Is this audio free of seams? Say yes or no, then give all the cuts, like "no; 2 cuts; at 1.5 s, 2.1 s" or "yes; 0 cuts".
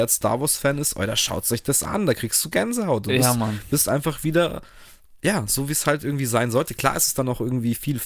yes; 0 cuts